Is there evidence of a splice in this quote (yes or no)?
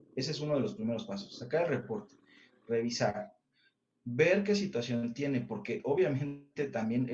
no